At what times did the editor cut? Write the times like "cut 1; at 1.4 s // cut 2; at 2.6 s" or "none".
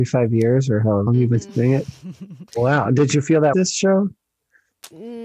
cut 1; at 1.1 s // cut 2; at 2.5 s // cut 3; at 3.5 s

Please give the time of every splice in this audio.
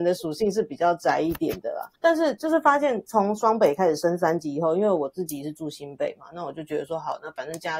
cut 1; at 1.9 s

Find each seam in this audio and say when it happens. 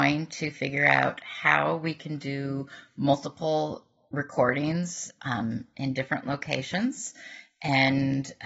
none

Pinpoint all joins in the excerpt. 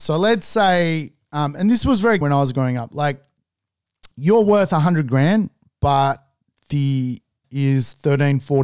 cut 1; at 2.2 s // cut 2; at 4.1 s // cut 3; at 7.4 s

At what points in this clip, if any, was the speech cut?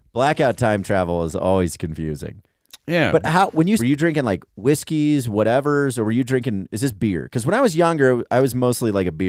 cut 1; at 3.8 s

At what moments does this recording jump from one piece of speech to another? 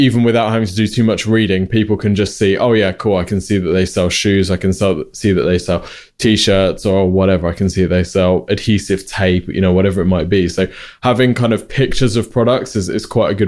none

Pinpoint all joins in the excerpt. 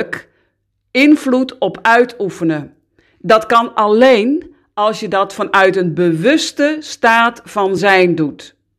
none

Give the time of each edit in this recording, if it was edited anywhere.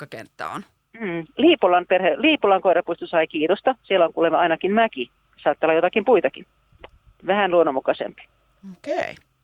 none

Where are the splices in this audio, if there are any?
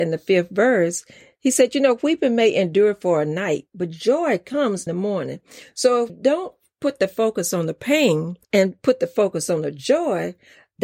cut 1; at 4.9 s // cut 2; at 6.1 s // cut 3; at 8.4 s

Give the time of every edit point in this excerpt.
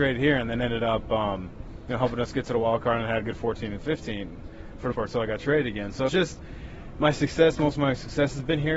cut 1; at 4.9 s // cut 2; at 6.1 s

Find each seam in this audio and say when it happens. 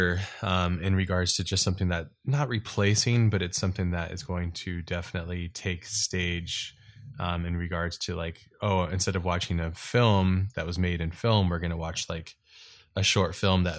none

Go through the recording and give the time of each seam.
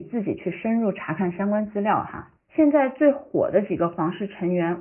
cut 1; at 2.4 s

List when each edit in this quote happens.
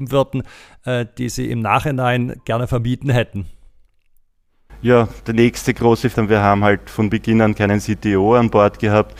cut 1; at 5.2 s // cut 2; at 6.1 s

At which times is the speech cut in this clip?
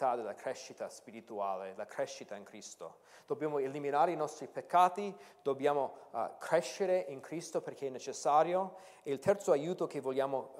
none

